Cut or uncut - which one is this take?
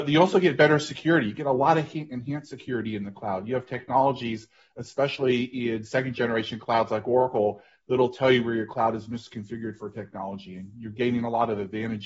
uncut